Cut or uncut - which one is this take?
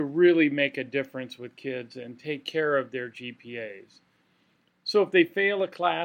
uncut